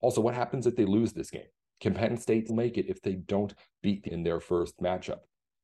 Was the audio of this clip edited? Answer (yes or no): yes